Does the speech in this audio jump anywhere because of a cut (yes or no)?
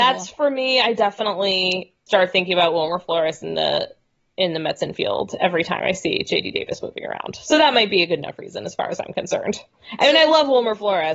yes